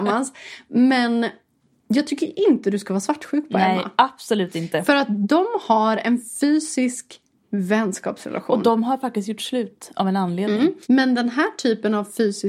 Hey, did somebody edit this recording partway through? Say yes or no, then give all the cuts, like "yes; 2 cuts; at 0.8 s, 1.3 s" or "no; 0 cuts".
yes; 1 cut; at 10.8 s